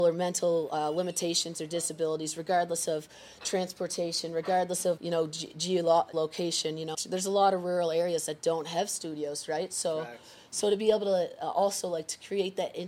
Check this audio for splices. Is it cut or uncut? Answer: cut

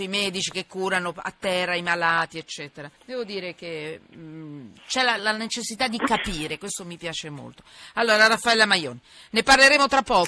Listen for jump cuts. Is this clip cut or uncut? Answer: cut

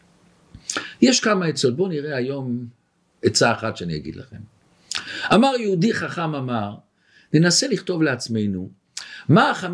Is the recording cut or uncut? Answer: uncut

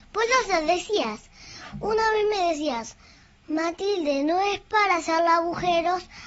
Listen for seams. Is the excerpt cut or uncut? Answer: uncut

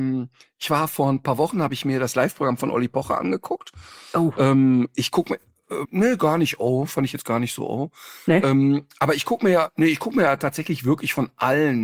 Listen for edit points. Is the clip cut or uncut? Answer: cut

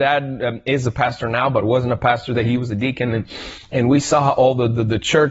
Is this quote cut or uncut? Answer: uncut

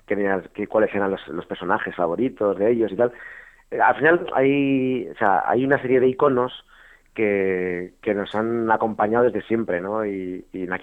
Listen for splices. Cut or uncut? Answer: uncut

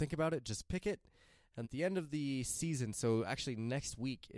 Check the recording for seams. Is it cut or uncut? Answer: cut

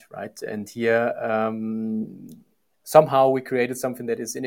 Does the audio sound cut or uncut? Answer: uncut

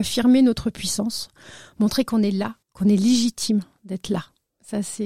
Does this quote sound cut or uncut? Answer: cut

